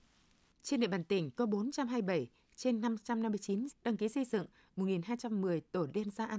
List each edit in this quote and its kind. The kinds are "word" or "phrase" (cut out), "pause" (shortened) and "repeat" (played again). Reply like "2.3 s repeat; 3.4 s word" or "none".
1.4 s word; 3.7 s phrase